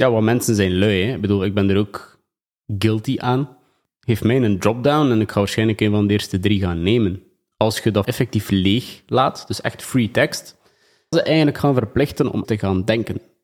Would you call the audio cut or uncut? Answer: cut